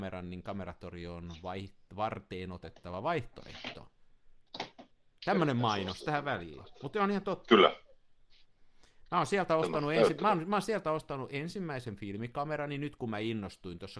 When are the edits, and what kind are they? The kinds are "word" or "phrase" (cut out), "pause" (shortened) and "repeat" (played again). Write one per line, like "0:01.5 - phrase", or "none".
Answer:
none